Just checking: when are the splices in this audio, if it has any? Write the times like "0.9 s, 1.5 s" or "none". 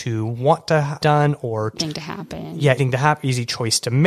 1.0 s, 1.8 s, 2.8 s